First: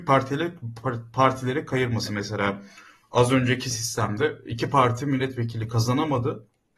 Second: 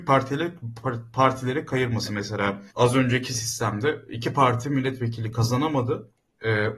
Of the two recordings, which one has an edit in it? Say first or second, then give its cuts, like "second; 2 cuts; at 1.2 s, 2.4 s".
second; 1 cut; at 2.7 s